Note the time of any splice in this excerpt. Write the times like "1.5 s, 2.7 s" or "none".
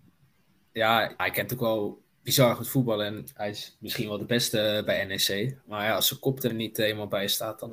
1.2 s, 6.5 s